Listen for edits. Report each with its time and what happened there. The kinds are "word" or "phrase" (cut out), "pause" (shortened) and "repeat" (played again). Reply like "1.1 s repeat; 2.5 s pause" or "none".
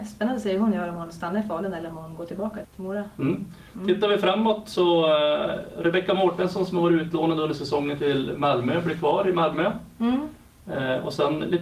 2.6 s word

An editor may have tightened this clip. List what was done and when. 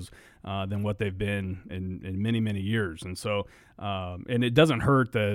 1.7 s word

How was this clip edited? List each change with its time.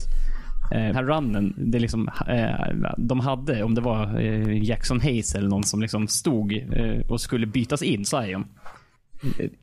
0.9 s word; 8.0 s word

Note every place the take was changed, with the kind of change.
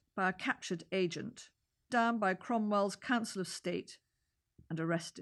1.9 s word

